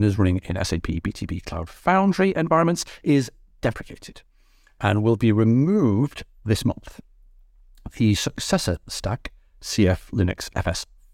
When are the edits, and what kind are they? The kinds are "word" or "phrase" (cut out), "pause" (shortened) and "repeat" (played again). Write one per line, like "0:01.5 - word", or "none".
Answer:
none